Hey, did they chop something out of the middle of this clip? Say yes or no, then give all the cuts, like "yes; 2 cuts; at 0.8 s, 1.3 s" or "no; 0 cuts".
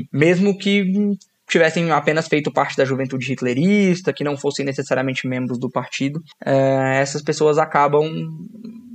no; 0 cuts